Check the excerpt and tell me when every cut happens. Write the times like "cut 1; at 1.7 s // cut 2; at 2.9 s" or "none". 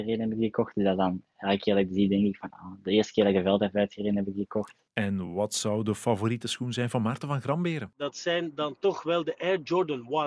none